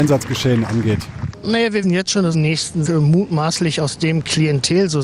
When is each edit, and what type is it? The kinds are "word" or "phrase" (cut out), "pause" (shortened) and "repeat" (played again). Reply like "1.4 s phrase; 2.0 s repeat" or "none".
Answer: 1.8 s word; 2.3 s phrase; 2.9 s word